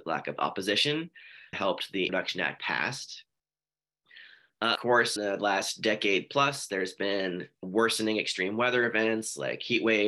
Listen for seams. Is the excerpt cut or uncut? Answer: cut